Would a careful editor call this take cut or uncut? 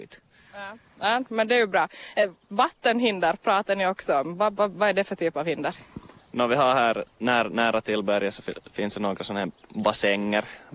cut